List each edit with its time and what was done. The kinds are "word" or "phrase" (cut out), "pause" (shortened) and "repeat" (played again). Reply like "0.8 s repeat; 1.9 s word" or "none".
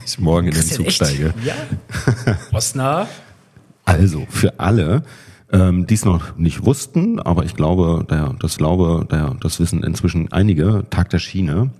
8.6 s repeat